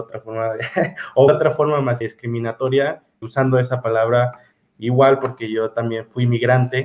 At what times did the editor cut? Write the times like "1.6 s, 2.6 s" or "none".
1.3 s, 2.0 s, 3.2 s